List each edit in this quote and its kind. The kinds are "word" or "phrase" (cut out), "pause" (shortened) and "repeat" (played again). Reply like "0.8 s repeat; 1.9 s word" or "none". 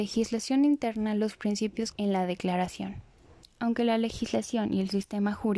1.9 s word